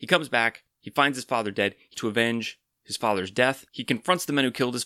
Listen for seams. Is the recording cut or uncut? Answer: cut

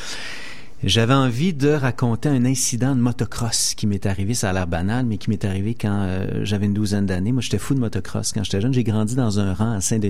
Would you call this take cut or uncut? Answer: uncut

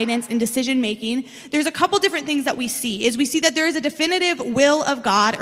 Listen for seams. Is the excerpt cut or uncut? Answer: uncut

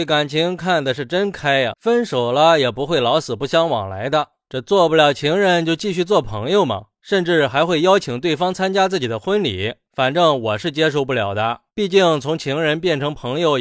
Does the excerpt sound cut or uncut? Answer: cut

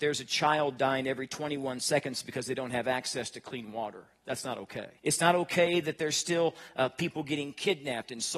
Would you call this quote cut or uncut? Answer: cut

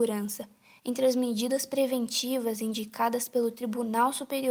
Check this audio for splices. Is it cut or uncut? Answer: uncut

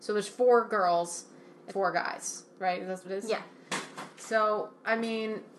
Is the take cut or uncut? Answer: cut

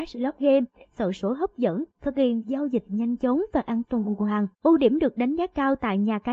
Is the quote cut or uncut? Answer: cut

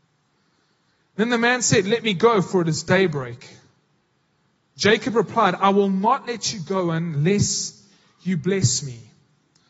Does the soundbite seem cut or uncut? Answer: uncut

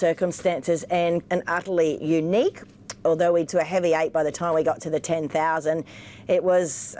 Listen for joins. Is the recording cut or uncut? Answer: cut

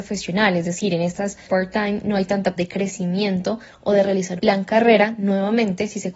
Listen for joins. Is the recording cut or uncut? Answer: cut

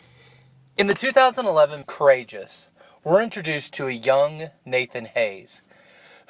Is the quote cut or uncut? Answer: cut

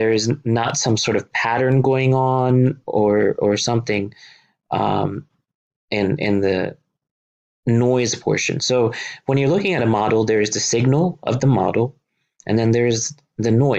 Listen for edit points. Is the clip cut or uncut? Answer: uncut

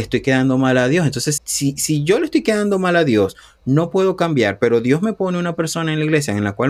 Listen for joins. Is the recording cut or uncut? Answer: cut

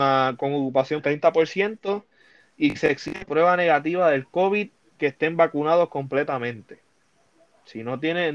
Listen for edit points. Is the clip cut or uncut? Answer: cut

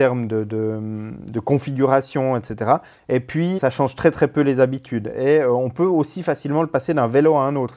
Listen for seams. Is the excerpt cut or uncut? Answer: cut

